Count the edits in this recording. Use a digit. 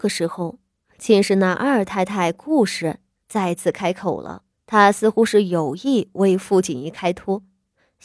1